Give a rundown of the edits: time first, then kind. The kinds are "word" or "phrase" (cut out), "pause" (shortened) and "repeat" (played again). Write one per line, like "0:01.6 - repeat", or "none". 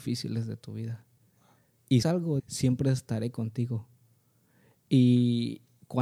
0:02.0 - word
0:02.4 - word

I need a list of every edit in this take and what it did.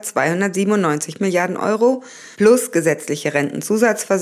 0:02.3 - pause

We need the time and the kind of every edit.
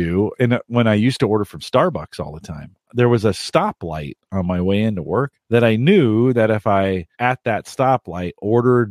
0:05.4 - pause
0:07.1 - pause

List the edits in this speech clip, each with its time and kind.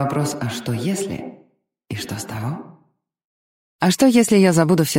none

